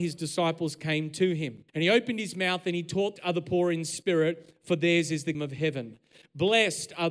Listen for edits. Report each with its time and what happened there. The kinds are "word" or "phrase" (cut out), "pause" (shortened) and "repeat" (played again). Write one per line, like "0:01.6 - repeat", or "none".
0:01.7 - pause
0:03.2 - phrase
0:05.3 - word

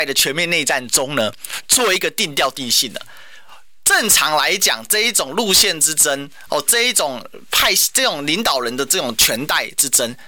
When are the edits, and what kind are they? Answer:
none

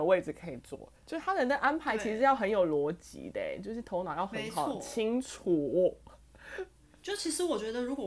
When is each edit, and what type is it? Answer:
0:01.0 - pause

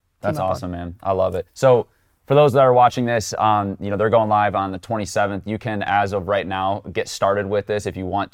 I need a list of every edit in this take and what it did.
0:01.5 - pause

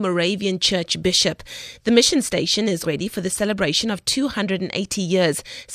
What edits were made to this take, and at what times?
0:02.8 - phrase

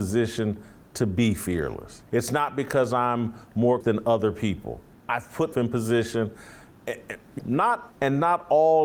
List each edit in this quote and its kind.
0:02.1 - pause
0:03.8 - word
0:04.9 - pause
0:05.5 - word
0:07.4 - word
0:07.9 - phrase

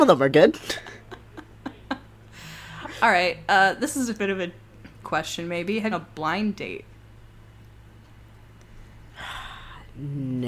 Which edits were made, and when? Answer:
0:05.0 - word
0:05.9 - phrase

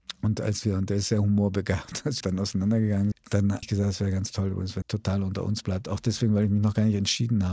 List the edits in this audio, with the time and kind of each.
0:02.2 - word
0:03.1 - word
0:03.6 - word
0:04.8 - word

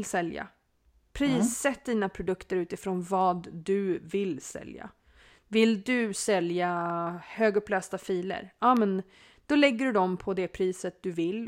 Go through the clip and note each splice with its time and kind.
none

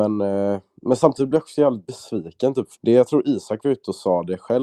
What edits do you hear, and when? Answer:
0:02.8 - word

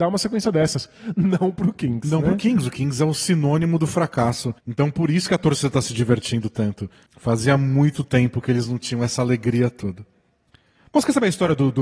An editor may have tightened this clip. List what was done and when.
0:04.6 - pause

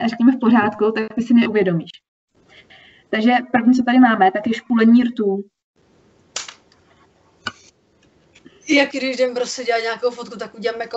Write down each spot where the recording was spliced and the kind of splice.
0:08.9 - word

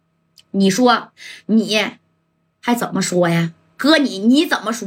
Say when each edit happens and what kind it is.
none

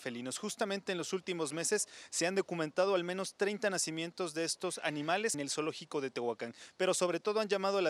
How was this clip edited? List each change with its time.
0:05.3 - word

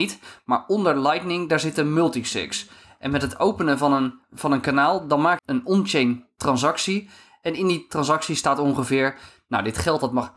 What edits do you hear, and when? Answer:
0:04.2 - word
0:05.4 - phrase

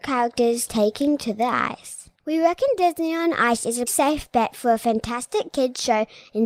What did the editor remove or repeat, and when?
0:02.2 - pause
0:03.9 - word

